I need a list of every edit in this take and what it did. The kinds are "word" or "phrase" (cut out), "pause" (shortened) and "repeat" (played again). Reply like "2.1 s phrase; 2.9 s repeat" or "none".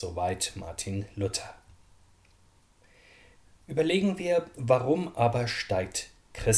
none